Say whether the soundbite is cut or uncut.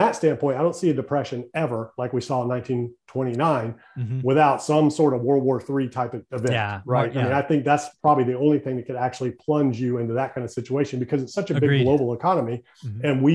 uncut